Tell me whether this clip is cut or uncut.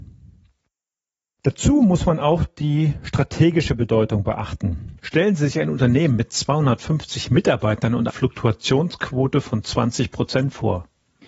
cut